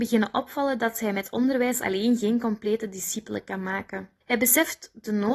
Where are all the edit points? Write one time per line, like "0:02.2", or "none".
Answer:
0:04.2